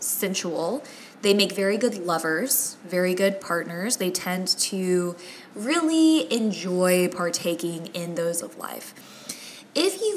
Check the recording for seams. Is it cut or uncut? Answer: cut